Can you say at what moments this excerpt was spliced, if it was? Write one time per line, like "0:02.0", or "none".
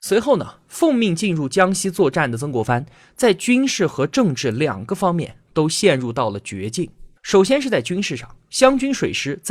0:07.2